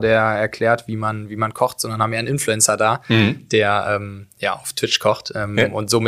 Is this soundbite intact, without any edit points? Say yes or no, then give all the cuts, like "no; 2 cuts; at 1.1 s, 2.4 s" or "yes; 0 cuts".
yes; 0 cuts